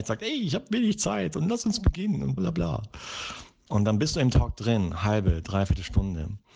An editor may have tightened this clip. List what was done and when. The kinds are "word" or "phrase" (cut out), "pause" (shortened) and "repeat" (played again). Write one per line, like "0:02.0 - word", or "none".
0:02.4 - word